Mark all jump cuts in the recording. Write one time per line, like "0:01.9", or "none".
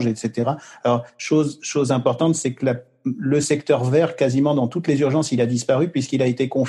none